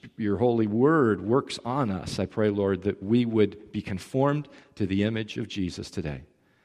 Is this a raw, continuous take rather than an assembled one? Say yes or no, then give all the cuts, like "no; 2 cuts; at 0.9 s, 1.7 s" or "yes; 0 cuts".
yes; 0 cuts